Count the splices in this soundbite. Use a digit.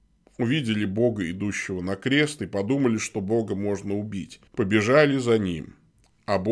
1